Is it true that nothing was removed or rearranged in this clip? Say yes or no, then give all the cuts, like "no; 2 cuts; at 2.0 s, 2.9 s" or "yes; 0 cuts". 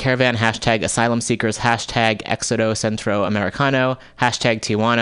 yes; 0 cuts